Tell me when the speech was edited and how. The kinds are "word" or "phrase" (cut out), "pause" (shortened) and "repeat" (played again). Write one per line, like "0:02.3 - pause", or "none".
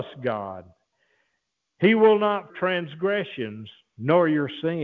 0:02.5 - phrase